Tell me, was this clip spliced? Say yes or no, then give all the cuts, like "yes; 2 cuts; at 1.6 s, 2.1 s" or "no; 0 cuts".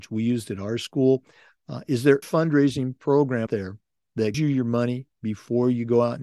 yes; 3 cuts; at 2.2 s, 3.5 s, 4.3 s